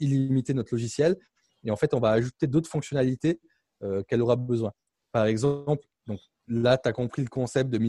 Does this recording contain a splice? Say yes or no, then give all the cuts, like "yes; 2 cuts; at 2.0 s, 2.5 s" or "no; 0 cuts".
no; 0 cuts